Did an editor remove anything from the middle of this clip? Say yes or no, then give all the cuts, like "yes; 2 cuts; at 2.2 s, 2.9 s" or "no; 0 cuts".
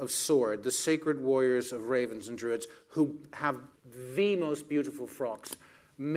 yes; 1 cut; at 3.8 s